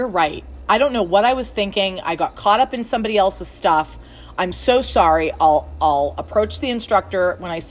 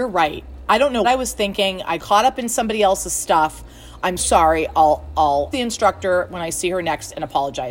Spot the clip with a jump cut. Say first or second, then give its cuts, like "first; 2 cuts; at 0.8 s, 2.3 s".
second; 4 cuts; at 1.0 s, 2.0 s, 4.2 s, 5.5 s